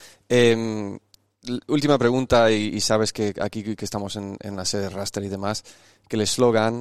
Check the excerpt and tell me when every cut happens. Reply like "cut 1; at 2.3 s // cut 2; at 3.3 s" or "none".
none